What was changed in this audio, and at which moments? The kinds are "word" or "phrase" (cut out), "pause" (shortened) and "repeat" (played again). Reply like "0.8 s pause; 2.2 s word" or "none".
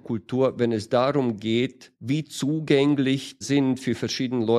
1.9 s pause; 3.4 s word